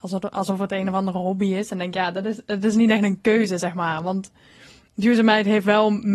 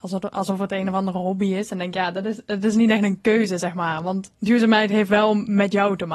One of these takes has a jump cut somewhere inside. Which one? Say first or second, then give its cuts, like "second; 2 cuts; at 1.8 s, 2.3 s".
second; 1 cut; at 4.3 s